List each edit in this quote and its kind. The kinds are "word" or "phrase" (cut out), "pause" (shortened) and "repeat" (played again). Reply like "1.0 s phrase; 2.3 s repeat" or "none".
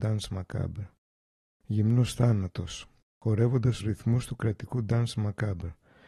3.8 s word

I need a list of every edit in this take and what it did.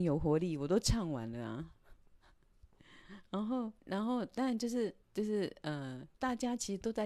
3.8 s pause; 5.0 s pause; 6.1 s pause

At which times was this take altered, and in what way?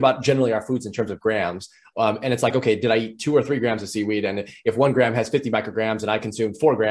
none

